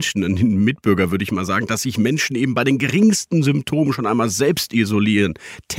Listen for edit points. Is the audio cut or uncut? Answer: uncut